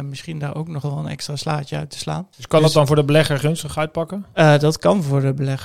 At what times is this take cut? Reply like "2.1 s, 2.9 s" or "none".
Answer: 2.3 s